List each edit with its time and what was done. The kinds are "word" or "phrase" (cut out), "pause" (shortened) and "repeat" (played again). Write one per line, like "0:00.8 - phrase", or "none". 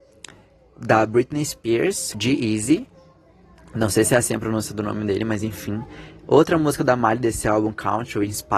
0:02.1 - word